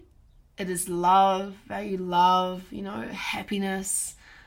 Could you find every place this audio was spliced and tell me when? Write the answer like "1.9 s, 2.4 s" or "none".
none